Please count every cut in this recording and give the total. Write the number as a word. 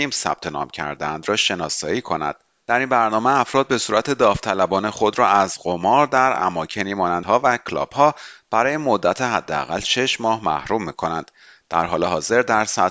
one